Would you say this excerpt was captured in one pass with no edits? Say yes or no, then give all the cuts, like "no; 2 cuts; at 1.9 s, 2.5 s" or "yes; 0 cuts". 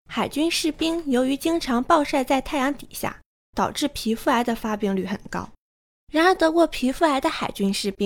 yes; 0 cuts